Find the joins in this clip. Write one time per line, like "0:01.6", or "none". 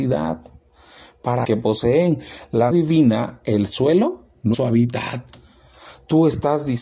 0:01.4
0:02.7
0:04.5